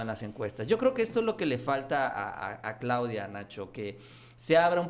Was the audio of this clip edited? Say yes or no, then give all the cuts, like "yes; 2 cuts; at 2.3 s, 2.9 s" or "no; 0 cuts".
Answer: no; 0 cuts